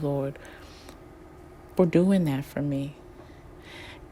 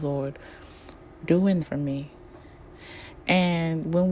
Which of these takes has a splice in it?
second; 2 cuts; at 1.2 s, 1.6 s

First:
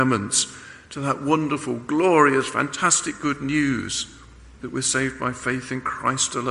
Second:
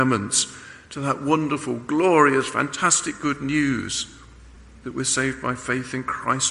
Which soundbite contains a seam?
first; 1 cut; at 4.6 s

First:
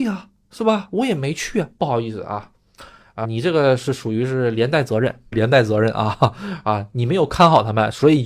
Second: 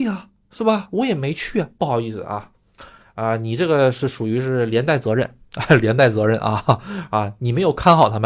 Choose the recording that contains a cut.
first; 2 cuts; at 3.2 s, 5.3 s

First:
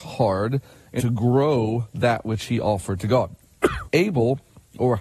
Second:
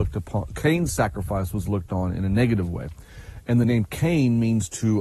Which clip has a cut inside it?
first; 2 cuts; at 1.0 s, 3.8 s

